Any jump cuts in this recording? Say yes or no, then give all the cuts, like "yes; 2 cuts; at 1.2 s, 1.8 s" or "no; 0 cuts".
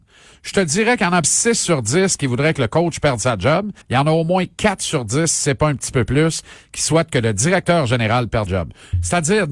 yes; 3 cuts; at 1.2 s, 3.8 s, 8.5 s